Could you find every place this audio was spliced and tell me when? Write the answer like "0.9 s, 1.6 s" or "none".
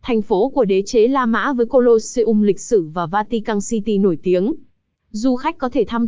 none